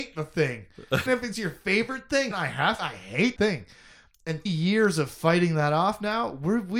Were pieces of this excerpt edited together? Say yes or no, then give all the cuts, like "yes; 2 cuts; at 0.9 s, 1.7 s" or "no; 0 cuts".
yes; 5 cuts; at 1.1 s, 2.3 s, 2.8 s, 3.4 s, 4.5 s